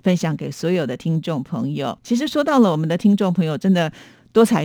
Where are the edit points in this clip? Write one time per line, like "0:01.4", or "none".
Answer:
0:02.0